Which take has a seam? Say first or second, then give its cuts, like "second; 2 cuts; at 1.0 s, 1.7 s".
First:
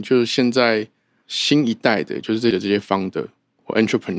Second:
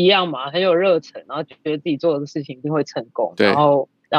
first; 1 cut; at 2.5 s